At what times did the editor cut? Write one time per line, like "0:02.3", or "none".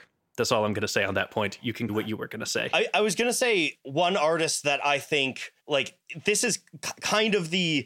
0:01.9
0:05.6